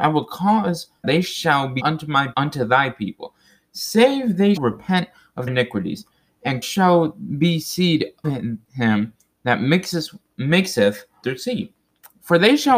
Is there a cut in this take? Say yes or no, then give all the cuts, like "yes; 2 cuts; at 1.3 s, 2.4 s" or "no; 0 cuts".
yes; 8 cuts; at 1.0 s, 1.8 s, 2.3 s, 4.6 s, 5.5 s, 6.6 s, 8.2 s, 11.2 s